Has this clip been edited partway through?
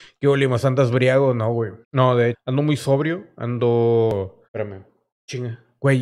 yes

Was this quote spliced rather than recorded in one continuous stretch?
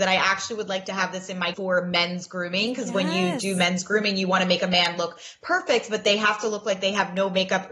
yes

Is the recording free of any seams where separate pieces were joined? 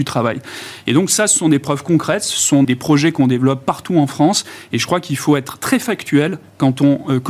no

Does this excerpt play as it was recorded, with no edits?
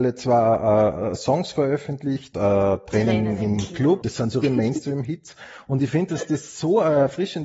no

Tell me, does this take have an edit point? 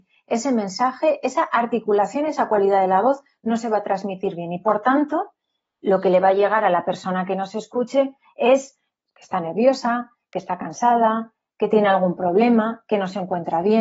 no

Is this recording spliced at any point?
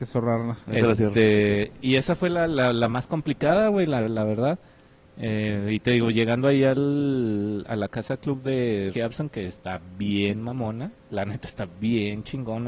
yes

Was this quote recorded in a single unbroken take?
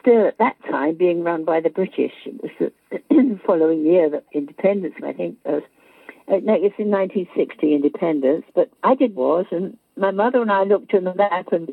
no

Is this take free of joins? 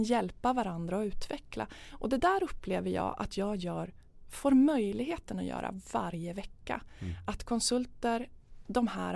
yes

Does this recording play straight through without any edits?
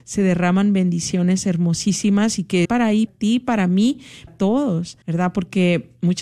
no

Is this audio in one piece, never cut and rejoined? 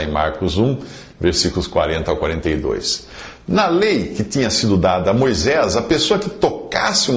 yes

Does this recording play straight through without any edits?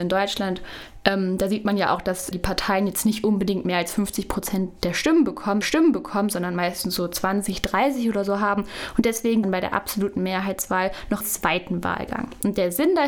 no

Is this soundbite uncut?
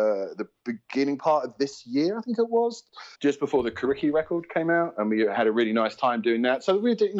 no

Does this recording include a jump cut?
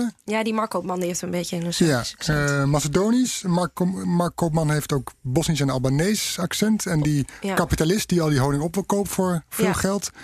no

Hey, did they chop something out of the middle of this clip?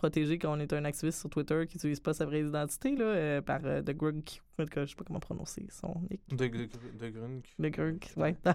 no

